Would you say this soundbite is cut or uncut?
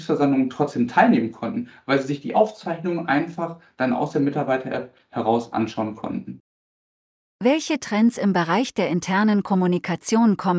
uncut